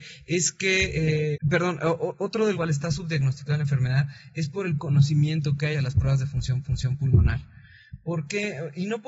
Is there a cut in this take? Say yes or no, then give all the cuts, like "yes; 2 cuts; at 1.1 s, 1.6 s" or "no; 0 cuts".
yes; 5 cuts; at 1.3 s, 2.5 s, 4.8 s, 5.7 s, 6.6 s